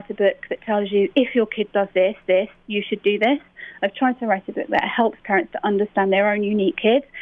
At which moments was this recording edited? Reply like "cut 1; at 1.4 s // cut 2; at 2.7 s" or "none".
cut 1; at 2.3 s